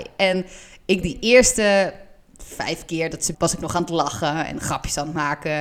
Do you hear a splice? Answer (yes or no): yes